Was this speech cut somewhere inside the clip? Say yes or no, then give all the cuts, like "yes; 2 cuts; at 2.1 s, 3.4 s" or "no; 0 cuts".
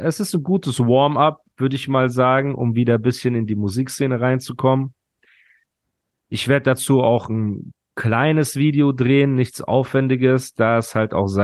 no; 0 cuts